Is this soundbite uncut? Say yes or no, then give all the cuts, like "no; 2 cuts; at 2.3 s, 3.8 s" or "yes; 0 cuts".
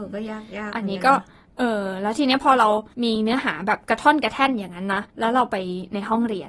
no; 2 cuts; at 2.9 s, 5.1 s